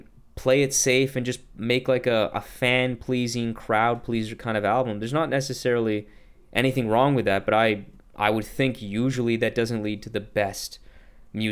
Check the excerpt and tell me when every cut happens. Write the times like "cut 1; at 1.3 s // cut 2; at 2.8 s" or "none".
none